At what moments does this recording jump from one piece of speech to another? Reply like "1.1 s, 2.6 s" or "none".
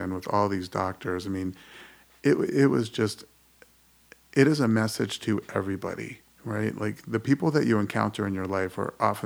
none